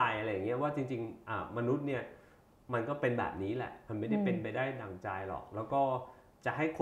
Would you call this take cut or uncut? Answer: uncut